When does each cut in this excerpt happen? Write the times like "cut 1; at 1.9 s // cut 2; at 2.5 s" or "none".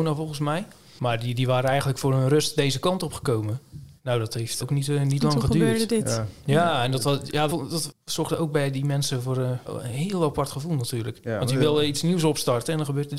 cut 1; at 4.0 s // cut 2; at 4.6 s // cut 3; at 7.5 s // cut 4; at 9.7 s